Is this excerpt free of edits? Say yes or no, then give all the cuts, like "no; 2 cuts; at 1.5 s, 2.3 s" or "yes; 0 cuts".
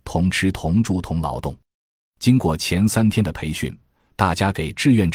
yes; 0 cuts